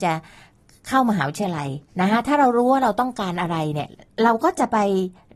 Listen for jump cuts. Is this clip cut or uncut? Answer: cut